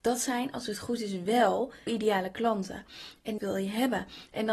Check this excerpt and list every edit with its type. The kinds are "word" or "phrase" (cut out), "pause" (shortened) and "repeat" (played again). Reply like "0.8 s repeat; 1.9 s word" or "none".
1.9 s word; 3.4 s phrase